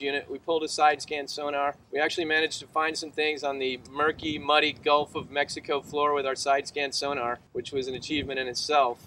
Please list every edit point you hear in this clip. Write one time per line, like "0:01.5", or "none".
0:01.8
0:07.5